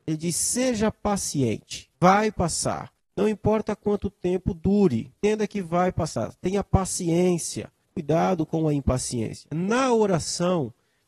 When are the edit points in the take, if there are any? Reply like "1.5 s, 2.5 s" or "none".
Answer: 1.9 s, 3.0 s, 5.2 s, 7.8 s